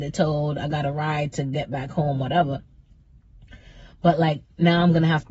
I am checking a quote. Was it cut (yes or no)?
no